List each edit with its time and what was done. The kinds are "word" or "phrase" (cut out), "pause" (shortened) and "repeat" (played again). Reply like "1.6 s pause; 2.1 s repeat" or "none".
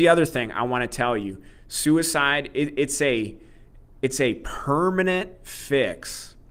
none